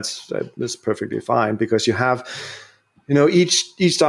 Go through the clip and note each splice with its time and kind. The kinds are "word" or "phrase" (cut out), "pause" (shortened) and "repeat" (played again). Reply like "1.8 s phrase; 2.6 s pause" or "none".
none